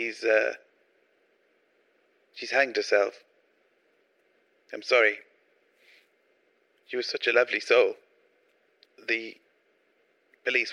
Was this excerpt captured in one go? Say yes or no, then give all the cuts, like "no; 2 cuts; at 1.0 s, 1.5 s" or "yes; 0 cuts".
yes; 0 cuts